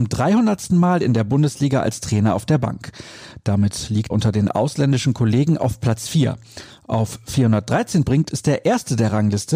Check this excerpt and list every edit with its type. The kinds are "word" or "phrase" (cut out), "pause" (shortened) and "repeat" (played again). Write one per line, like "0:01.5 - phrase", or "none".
0:04.1 - word
0:08.1 - word